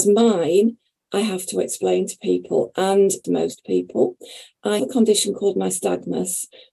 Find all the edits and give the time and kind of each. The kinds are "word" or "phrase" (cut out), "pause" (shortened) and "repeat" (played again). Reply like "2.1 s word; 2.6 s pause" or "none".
3.2 s phrase; 4.8 s word